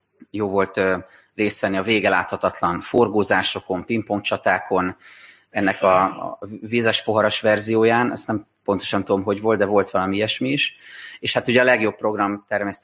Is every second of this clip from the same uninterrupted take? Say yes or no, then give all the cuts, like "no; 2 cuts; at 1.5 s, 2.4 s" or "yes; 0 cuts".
yes; 0 cuts